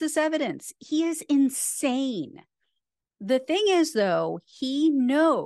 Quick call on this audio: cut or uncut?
uncut